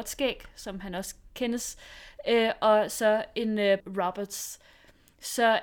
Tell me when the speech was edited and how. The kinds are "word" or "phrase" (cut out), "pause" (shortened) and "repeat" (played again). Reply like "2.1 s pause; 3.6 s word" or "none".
3.8 s word